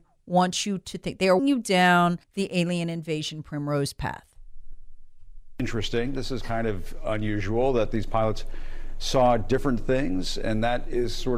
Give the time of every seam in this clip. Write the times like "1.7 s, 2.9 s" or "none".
1.4 s, 2.2 s